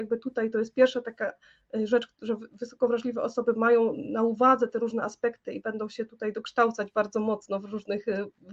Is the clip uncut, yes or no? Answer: yes